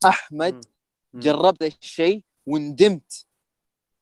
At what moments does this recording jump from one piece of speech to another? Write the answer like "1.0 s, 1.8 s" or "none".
1.6 s